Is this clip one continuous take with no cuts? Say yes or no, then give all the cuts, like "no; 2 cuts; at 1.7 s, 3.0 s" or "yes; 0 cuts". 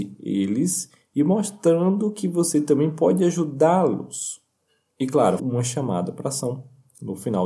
no; 1 cut; at 5.4 s